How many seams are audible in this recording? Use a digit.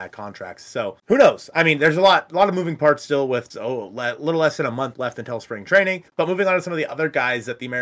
3